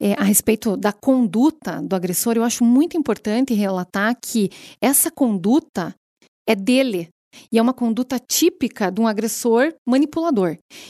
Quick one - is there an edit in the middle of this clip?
no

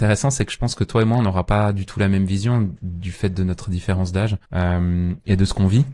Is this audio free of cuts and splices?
no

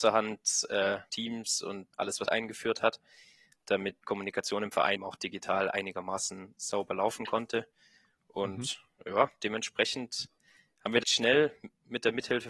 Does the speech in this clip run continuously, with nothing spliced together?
no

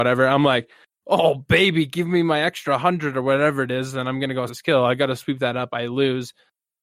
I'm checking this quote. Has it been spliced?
yes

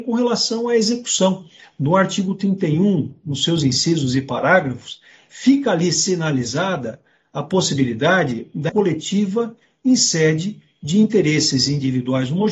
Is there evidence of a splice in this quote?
yes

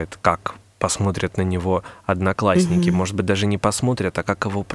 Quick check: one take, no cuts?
yes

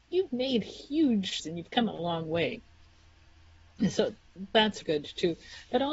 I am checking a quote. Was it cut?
yes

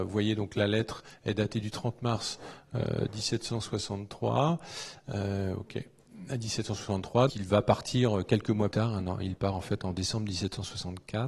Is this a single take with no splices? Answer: no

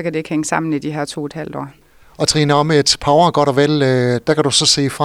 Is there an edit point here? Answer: yes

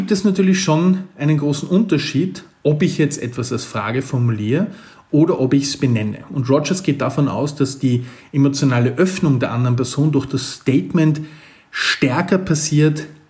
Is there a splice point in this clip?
no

